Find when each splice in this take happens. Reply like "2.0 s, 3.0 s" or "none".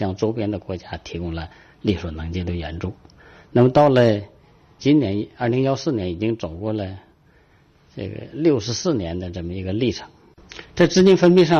4.8 s